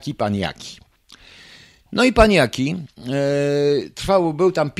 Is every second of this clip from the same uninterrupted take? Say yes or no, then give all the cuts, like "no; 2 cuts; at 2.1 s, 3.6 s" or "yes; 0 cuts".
yes; 0 cuts